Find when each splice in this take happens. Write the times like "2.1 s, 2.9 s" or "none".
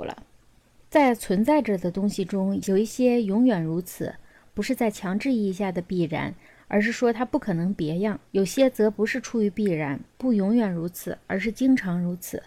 8.3 s

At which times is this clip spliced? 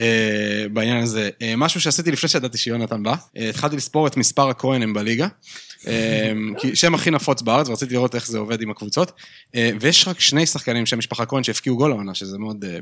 3.3 s

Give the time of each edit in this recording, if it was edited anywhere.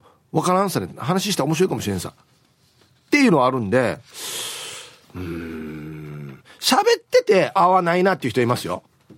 7.6 s

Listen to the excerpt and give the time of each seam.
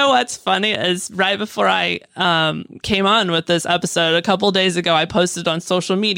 none

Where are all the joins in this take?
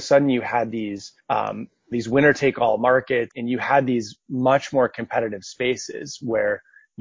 1.2 s, 1.9 s, 3.3 s

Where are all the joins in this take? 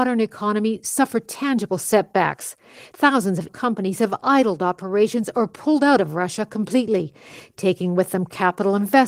3.5 s

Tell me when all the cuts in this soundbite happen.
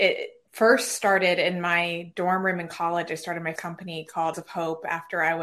3.6 s, 4.3 s

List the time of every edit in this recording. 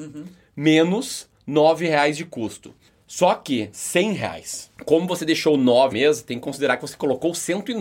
2.9 s, 3.7 s, 4.7 s, 5.9 s

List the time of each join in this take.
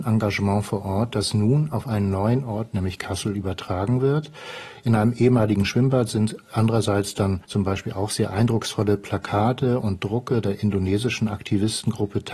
7.4 s

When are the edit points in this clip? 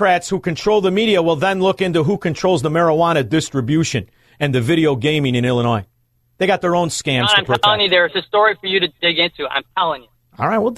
none

